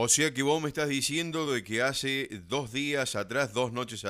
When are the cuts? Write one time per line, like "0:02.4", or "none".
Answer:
none